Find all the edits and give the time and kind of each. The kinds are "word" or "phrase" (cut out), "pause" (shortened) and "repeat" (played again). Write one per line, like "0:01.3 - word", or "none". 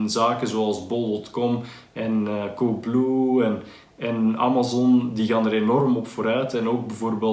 none